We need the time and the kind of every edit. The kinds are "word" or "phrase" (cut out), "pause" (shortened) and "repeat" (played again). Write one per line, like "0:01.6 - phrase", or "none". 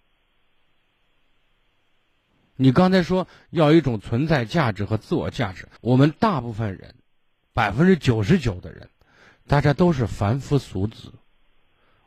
0:05.8 - pause